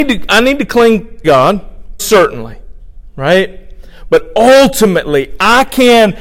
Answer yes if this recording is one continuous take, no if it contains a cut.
no